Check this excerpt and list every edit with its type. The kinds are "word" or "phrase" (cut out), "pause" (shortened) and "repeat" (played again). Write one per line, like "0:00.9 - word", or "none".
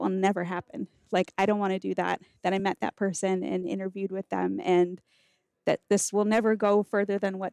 none